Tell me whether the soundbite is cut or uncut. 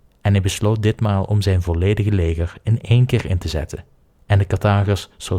uncut